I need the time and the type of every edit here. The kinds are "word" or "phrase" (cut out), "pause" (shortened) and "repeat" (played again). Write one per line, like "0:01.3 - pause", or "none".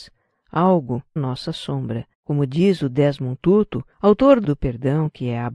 0:01.2 - word
0:02.1 - pause
0:03.9 - pause
0:04.4 - word